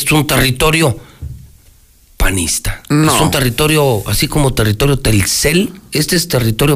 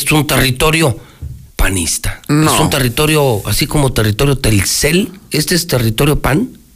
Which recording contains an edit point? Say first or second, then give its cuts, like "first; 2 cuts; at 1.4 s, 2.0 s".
second; 1 cut; at 1.5 s